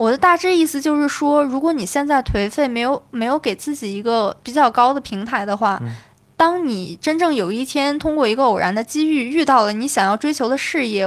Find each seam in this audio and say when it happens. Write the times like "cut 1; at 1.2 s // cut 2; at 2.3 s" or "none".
cut 1; at 4.4 s